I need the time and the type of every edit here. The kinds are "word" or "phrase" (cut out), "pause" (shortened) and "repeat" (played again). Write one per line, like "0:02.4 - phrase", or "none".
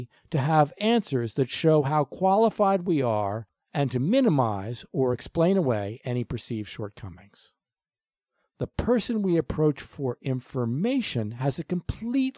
none